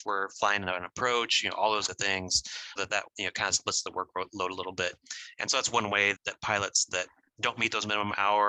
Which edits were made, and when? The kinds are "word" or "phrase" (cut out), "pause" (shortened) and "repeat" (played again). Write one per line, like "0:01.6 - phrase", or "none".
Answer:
0:01.9 - word
0:02.8 - word
0:03.1 - word
0:06.2 - word